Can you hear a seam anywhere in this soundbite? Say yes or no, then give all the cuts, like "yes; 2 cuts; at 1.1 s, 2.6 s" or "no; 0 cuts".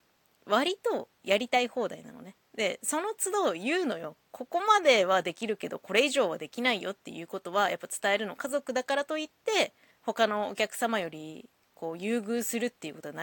yes; 2 cuts; at 2.4 s, 9.9 s